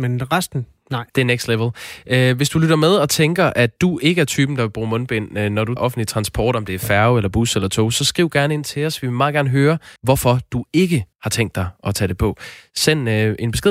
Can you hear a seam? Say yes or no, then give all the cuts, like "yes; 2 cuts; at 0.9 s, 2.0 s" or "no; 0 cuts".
yes; 5 cuts; at 1.1 s, 3.8 s, 5.8 s, 10.0 s, 11.1 s